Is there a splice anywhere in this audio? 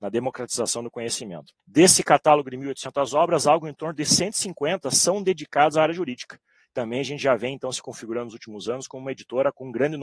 yes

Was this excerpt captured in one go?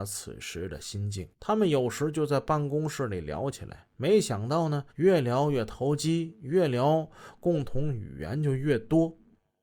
no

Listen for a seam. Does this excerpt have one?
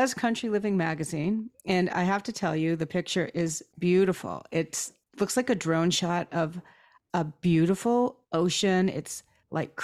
no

